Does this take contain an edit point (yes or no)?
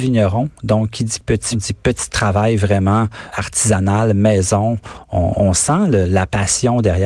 yes